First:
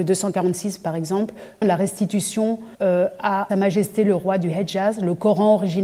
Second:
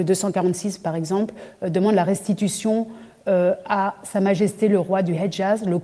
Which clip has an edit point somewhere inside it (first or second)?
first